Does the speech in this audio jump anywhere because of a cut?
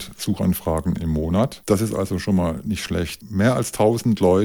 no; 0 cuts

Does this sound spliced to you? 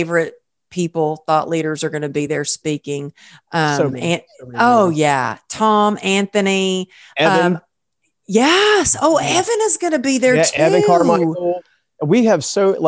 no; 0 cuts

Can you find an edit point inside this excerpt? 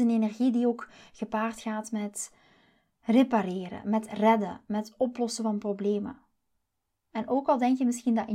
no; 0 cuts

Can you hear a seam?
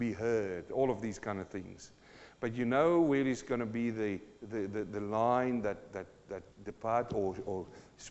yes; 1 cut; at 6.5 s

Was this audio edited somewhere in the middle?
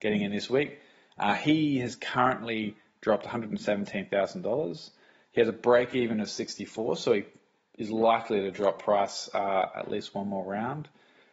no; 0 cuts

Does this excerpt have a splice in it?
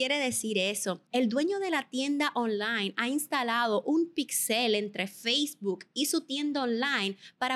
yes; 1 cut; at 1.1 s

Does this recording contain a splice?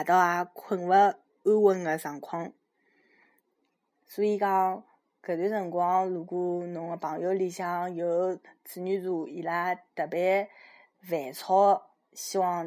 no; 0 cuts

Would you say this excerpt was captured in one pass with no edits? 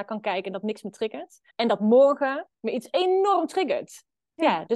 no; 2 cuts; at 1.5 s, 2.5 s

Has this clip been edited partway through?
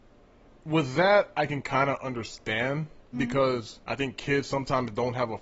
yes; 2 cuts; at 3.1 s, 3.8 s

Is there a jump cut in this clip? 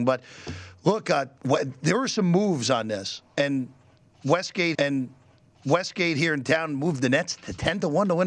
yes; 2 cuts; at 1.4 s, 4.7 s

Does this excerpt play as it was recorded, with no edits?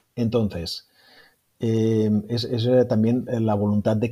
yes; 0 cuts

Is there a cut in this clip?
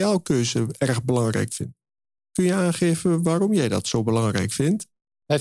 no; 0 cuts

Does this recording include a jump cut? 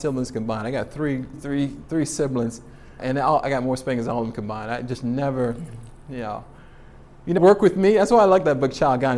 yes; 3 cuts; at 1.3 s, 3.0 s, 7.4 s

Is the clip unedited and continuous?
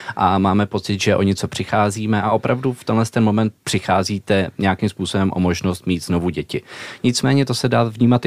no; 1 cut; at 3.6 s

